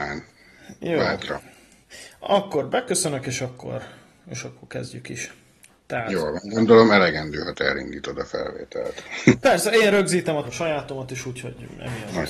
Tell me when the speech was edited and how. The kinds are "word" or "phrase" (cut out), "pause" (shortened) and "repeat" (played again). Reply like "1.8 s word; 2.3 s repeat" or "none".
10.4 s phrase

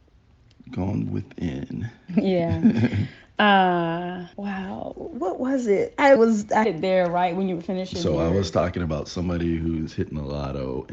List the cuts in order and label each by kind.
4.3 s pause; 6.2 s word; 6.6 s word

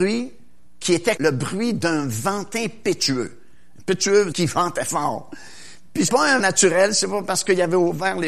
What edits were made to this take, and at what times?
1.2 s word; 4.3 s word; 6.1 s word; 6.4 s word

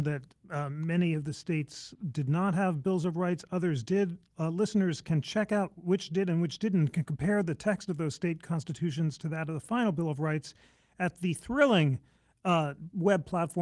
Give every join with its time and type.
none

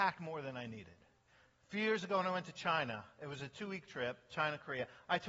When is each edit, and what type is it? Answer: none

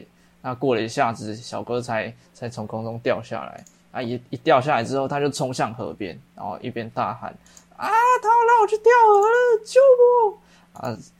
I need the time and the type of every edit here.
none

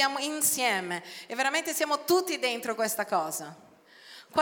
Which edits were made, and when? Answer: none

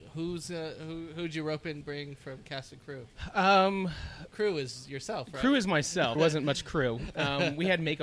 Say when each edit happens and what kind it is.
1.8 s word; 4.3 s word; 6.2 s word

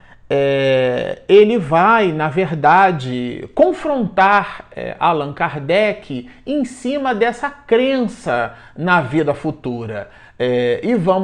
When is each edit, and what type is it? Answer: none

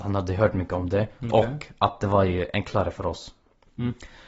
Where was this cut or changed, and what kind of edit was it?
none

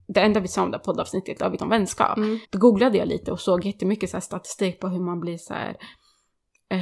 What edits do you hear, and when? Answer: 1.6 s phrase; 2.4 s pause

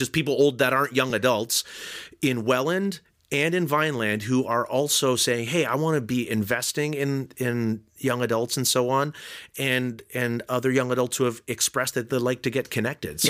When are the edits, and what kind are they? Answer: none

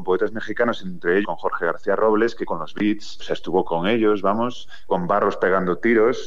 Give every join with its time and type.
1.2 s word; 2.5 s word; 3.6 s word; 4.9 s word

